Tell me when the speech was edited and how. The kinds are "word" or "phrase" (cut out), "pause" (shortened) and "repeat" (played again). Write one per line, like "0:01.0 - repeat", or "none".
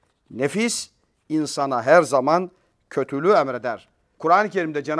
none

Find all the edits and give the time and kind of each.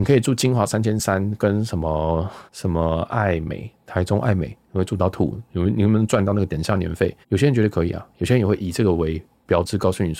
0:02.5 - pause
0:07.2 - pause

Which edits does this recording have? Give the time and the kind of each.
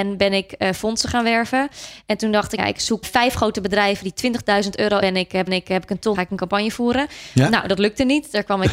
0:02.6 - word
0:03.0 - word
0:05.0 - phrase
0:05.5 - repeat
0:06.1 - phrase

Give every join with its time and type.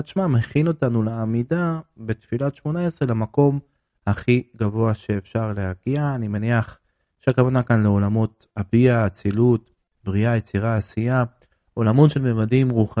none

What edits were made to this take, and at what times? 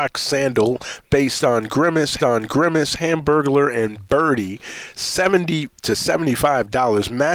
0:02.2 - repeat
0:05.8 - pause

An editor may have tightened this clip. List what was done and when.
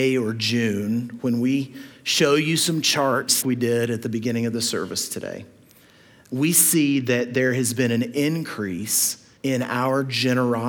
0:03.4 - word
0:09.4 - pause

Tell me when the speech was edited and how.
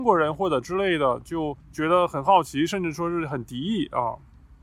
0:01.6 - pause

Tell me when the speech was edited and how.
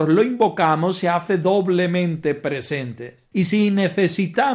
none

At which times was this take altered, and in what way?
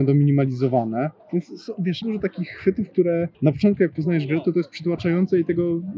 0:01.2 - pause
0:02.0 - word
0:03.3 - pause

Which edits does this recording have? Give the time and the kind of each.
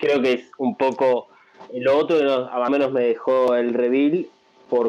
0:01.7 - word
0:02.7 - phrase

